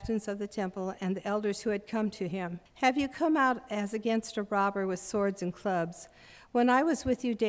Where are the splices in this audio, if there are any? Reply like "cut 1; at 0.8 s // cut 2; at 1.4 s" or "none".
cut 1; at 2.7 s